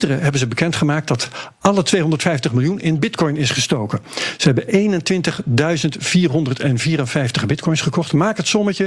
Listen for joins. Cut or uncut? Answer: uncut